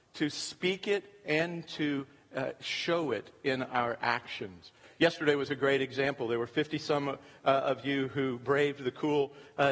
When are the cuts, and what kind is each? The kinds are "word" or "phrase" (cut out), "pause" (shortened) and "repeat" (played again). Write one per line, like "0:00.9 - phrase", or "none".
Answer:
none

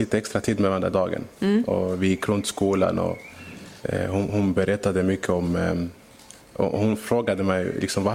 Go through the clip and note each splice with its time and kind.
0:00.9 - word
0:03.8 - pause
0:06.4 - pause

